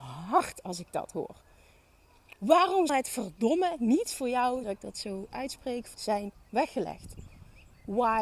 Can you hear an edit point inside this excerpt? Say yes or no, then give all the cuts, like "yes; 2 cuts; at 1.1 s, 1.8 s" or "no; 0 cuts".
yes; 3 cuts; at 2.9 s, 4.6 s, 5.9 s